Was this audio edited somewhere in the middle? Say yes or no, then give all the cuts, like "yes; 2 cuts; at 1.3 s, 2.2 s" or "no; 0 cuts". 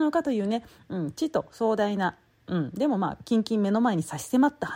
no; 0 cuts